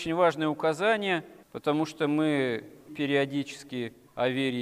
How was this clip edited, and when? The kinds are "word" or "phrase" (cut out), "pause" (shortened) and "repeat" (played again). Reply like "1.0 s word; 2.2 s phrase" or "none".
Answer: 1.4 s pause; 2.9 s word